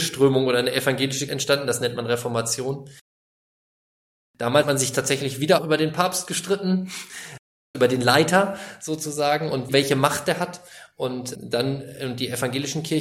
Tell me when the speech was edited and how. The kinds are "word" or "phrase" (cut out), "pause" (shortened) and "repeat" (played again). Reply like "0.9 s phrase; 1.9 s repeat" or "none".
1.3 s word; 4.6 s word; 5.6 s word; 7.7 s word; 9.7 s word; 11.3 s word